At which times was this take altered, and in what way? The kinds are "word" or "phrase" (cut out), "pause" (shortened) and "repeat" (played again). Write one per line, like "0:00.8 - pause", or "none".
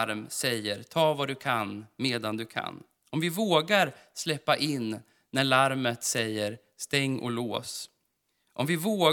none